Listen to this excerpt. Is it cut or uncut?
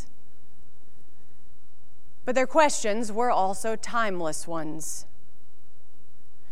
uncut